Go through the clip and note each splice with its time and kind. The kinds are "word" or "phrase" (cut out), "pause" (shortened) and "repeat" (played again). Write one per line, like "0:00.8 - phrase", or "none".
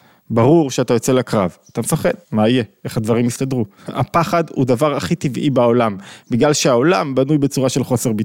0:02.2 - pause
0:03.8 - pause

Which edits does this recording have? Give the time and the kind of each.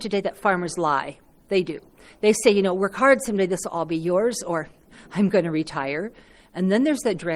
none

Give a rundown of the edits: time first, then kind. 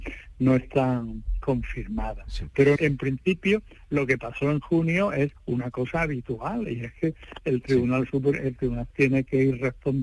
0:02.8 - word
0:05.4 - pause
0:08.9 - word

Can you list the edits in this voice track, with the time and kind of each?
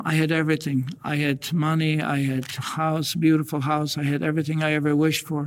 none

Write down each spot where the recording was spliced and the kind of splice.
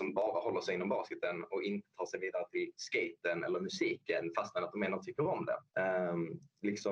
0:05.7 - pause

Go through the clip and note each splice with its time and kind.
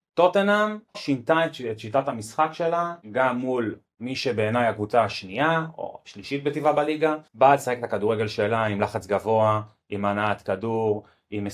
0:00.9 - word
0:03.0 - pause
0:07.3 - pause

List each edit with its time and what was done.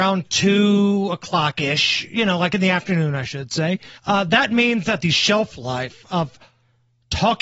0:04.0 - pause

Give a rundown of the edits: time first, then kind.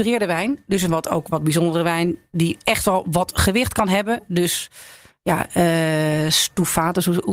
none

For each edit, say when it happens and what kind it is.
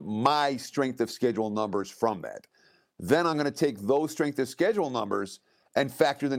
none

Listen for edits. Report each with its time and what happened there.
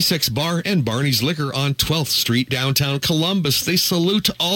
0:02.5 - word

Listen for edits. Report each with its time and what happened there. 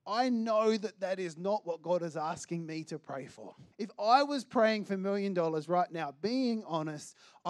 0:03.7 - pause

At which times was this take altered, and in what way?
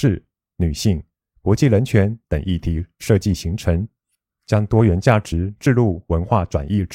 none

